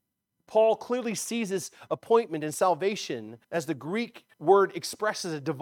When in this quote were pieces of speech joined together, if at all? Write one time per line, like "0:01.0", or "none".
0:03.4
0:04.3